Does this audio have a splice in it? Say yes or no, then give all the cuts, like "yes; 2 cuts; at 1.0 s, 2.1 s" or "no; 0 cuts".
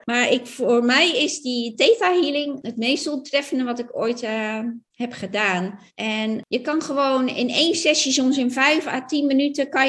yes; 2 cuts; at 4.9 s, 5.9 s